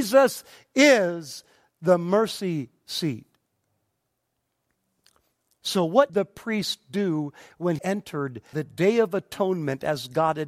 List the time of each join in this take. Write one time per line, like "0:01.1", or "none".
0:06.1
0:07.8
0:08.5